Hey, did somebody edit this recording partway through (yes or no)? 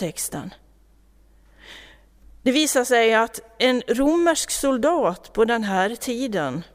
no